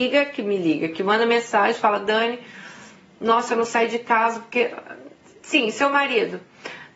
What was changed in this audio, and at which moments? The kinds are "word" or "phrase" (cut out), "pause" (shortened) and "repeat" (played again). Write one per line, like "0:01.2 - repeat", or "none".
none